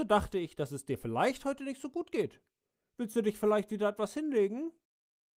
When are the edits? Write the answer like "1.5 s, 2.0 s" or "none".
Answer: none